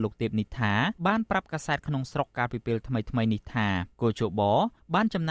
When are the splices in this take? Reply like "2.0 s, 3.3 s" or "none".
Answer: 1.0 s, 3.9 s